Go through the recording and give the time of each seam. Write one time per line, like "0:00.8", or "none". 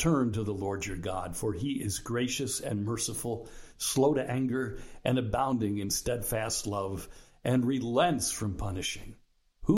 none